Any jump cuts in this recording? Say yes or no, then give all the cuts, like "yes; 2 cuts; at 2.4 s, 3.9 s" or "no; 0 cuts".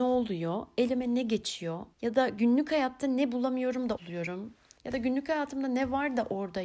yes; 2 cuts; at 1.9 s, 4.0 s